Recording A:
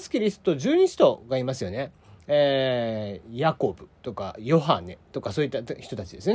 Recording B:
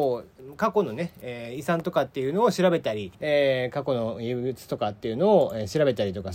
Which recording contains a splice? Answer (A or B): B